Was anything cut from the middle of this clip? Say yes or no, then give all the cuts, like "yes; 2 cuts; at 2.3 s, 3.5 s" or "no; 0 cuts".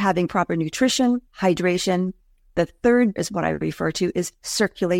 yes; 2 cuts; at 1.3 s, 3.2 s